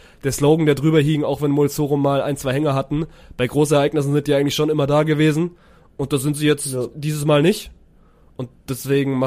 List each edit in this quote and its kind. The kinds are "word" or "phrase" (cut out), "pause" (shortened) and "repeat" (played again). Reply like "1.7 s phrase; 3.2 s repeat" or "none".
none